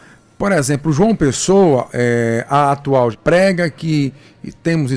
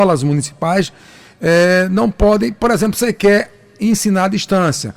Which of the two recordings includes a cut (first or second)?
first